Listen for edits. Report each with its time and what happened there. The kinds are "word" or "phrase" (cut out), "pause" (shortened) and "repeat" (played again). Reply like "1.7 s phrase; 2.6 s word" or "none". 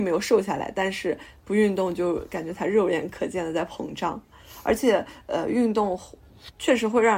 none